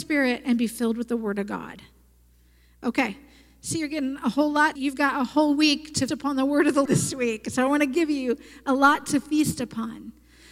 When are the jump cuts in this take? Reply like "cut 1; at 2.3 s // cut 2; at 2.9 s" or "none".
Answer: cut 1; at 4.8 s // cut 2; at 6.1 s // cut 3; at 6.9 s